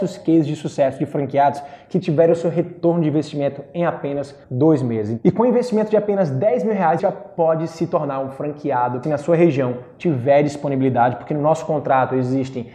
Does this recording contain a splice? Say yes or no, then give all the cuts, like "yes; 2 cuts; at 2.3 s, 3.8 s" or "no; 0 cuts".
yes; 3 cuts; at 4.4 s, 7.0 s, 9.0 s